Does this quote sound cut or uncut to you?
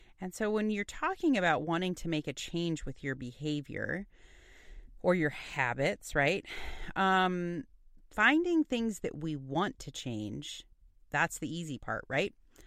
uncut